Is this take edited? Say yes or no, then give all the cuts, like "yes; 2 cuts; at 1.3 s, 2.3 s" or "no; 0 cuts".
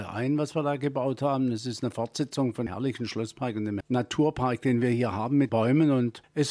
yes; 3 cuts; at 2.7 s, 3.8 s, 5.5 s